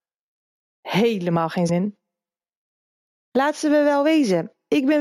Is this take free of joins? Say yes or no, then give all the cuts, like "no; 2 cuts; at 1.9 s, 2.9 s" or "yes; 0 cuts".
no; 1 cut; at 1.7 s